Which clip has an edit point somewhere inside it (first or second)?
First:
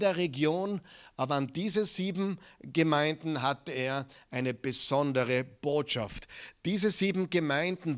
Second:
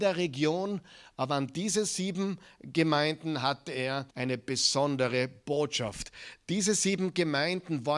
second